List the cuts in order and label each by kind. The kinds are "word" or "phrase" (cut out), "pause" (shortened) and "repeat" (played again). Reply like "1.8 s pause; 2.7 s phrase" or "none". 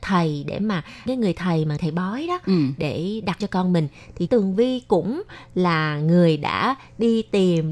1.1 s word; 1.8 s word; 3.4 s word; 4.3 s word